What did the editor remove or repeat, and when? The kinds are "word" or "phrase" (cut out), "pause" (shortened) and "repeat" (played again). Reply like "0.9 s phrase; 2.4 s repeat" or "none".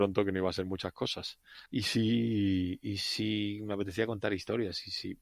1.7 s pause